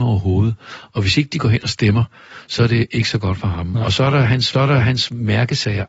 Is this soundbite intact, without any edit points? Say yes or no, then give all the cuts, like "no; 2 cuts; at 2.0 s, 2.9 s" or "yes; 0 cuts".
no; 1 cut; at 4.5 s